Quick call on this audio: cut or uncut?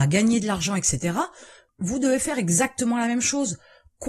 uncut